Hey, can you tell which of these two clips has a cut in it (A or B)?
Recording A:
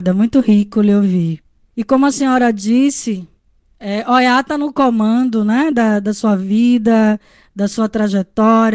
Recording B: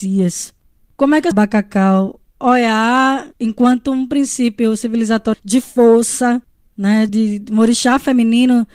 B